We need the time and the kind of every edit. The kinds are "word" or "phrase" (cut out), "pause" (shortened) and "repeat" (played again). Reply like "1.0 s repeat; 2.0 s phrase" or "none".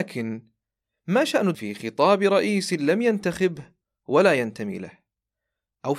1.5 s phrase

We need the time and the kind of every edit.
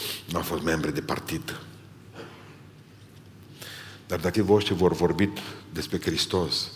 4.3 s word

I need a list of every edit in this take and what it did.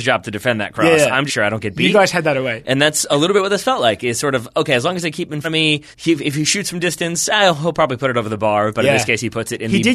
1.3 s phrase; 5.4 s word; 5.9 s pause

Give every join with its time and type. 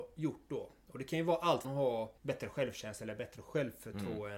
1.6 s word; 2.2 s pause

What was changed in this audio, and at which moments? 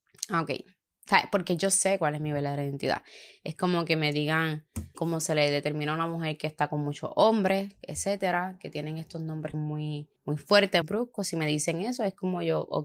4.9 s word; 9.5 s phrase; 10.2 s pause; 10.8 s word

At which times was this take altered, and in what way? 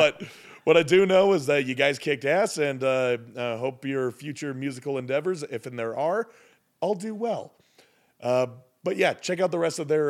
none

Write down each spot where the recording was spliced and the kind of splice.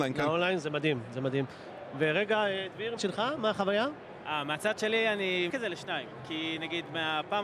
3.0 s word; 5.5 s word

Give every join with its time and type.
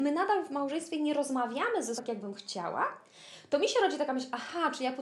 2.0 s word

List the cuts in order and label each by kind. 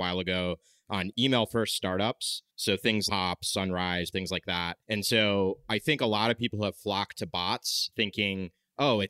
1.1 s word; 2.5 s pause; 3.1 s phrase; 4.1 s word; 4.8 s pause

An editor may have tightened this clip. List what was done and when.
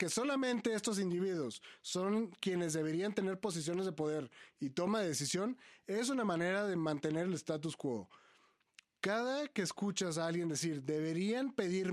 none

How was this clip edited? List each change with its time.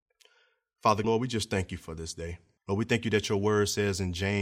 1.0 s word; 2.6 s pause

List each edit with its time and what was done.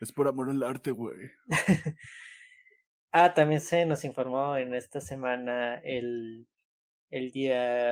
none

